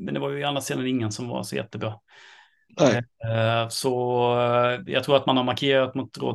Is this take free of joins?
yes; 0 cuts

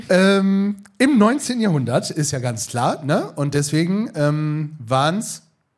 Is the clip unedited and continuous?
yes; 0 cuts

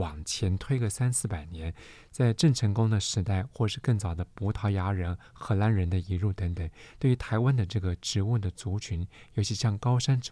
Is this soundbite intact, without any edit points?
yes; 0 cuts

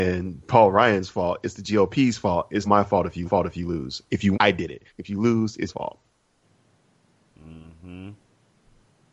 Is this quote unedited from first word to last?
no; 5 cuts; at 2.7 s, 3.3 s, 4.3 s, 4.9 s, 5.7 s

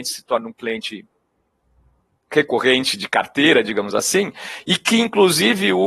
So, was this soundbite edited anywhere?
no; 0 cuts

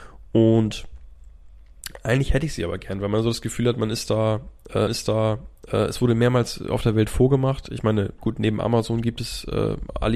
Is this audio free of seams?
no; 1 cut; at 4.9 s

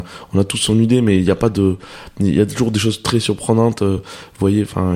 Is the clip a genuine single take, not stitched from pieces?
yes; 0 cuts

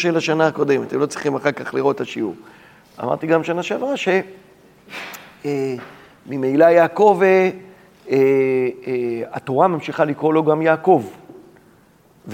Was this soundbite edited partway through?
no; 0 cuts

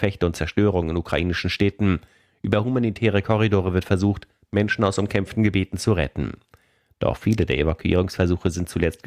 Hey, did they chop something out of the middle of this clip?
no; 0 cuts

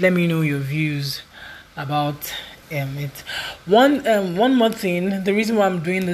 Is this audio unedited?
no; 1 cut; at 2.6 s

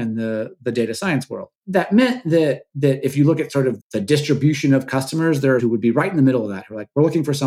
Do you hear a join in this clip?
yes; 3 cuts; at 1.6 s, 3.8 s, 5.6 s

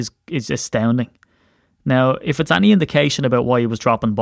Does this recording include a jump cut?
no; 0 cuts

